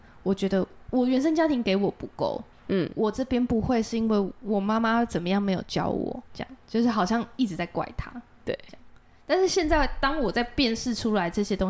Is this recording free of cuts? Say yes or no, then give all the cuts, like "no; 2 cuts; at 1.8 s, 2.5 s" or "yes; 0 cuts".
no; 1 cut; at 6.3 s